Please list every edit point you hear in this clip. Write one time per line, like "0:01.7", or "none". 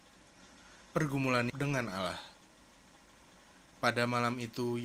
0:01.5